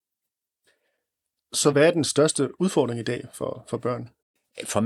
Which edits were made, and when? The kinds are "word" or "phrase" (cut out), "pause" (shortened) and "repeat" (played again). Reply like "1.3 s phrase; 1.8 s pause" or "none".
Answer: none

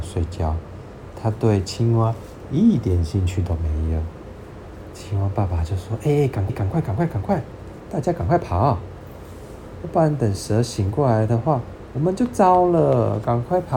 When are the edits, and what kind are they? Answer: 6.5 s repeat

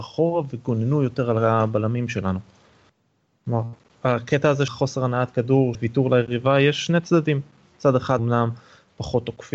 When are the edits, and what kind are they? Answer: 4.7 s word; 5.7 s word; 8.2 s word

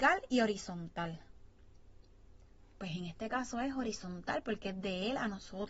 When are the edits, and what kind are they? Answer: none

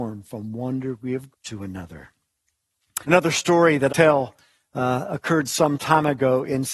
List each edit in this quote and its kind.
1.3 s word; 3.0 s pause; 3.9 s phrase

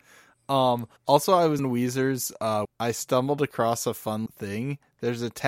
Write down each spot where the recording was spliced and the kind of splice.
1.0 s pause; 1.6 s word; 2.6 s phrase; 4.3 s word

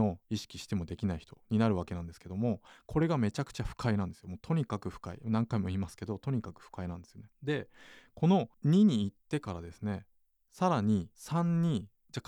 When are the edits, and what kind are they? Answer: 7.3 s pause; 8.5 s pause; 10.1 s pause; 11.1 s pause

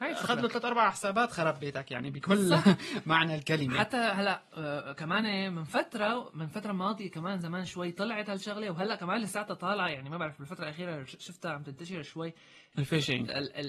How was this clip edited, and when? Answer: 12.7 s word

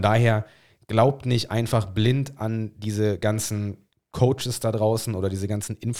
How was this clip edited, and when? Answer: none

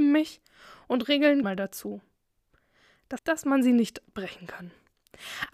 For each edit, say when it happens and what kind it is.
1.4 s phrase; 3.2 s phrase

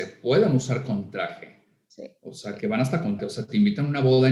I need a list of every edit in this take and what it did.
2.6 s word; 3.2 s word

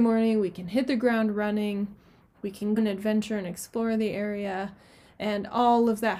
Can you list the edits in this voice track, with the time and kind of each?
2.8 s word

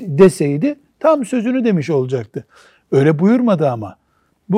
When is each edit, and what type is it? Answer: none

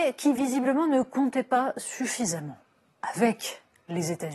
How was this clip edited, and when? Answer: none

